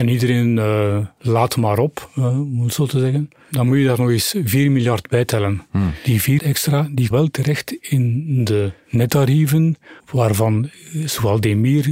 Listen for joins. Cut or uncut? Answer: cut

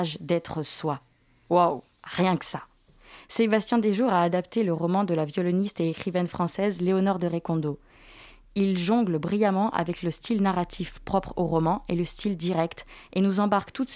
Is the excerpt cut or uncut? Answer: uncut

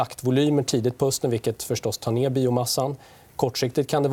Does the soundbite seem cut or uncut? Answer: uncut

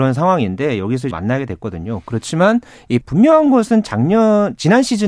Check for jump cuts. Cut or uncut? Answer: cut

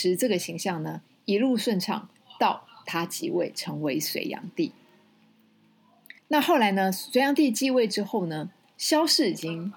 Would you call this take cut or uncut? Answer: cut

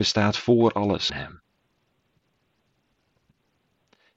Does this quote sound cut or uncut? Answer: cut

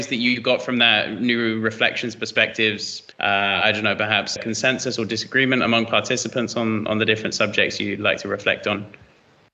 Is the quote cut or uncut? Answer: cut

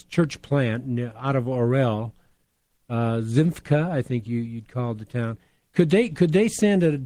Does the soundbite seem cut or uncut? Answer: uncut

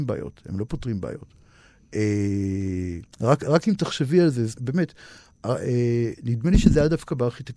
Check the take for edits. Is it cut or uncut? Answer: cut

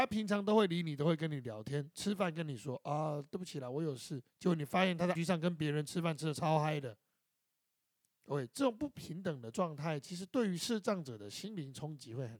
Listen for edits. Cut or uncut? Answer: cut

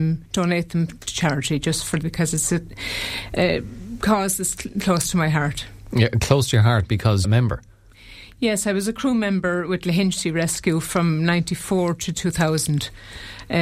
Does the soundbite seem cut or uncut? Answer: cut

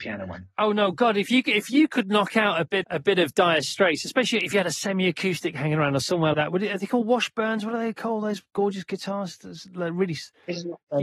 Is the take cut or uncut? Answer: cut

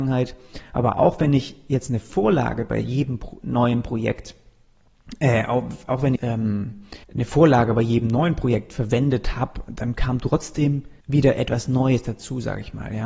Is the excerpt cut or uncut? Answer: cut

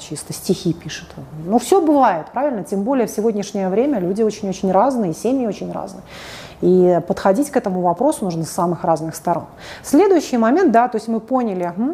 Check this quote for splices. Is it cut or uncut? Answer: uncut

